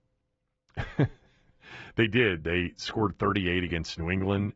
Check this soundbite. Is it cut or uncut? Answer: uncut